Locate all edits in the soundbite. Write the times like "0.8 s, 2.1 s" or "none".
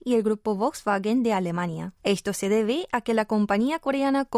2.0 s